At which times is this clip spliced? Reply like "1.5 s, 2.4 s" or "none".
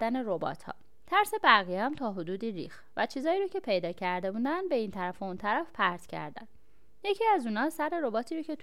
none